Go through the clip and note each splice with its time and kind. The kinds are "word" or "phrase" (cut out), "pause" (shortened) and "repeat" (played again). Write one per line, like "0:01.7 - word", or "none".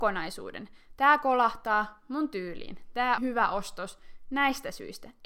0:03.2 - word